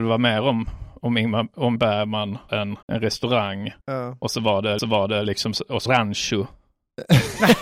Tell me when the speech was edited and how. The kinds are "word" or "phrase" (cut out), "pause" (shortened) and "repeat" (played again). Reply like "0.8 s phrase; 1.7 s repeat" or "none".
1.8 s word; 2.5 s word; 2.8 s pause; 3.8 s pause; 4.8 s repeat; 5.9 s phrase